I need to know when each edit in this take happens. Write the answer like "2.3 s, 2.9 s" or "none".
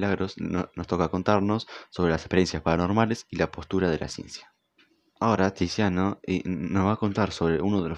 4.8 s